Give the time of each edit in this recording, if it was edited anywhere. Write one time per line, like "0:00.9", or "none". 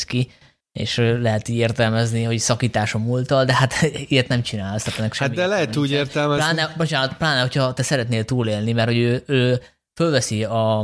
none